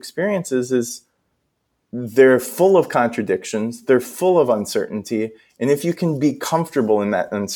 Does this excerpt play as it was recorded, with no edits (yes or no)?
yes